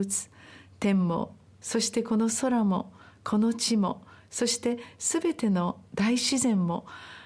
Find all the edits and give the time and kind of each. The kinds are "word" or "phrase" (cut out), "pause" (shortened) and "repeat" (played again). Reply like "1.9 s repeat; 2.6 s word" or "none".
none